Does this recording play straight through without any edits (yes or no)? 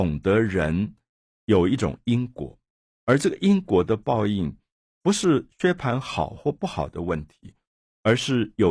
yes